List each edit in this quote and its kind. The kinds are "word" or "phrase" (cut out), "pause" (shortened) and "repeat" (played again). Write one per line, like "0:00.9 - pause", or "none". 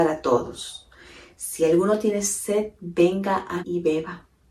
0:03.6 - word